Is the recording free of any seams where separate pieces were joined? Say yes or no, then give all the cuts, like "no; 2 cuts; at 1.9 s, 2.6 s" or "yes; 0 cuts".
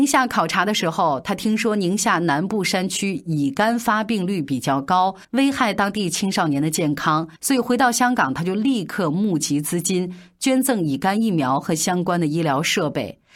no; 2 cuts; at 5.2 s, 7.4 s